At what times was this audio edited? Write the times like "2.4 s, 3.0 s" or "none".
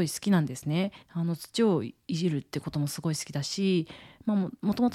1.0 s